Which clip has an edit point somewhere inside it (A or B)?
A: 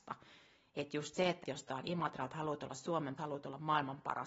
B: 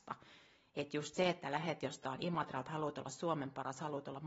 A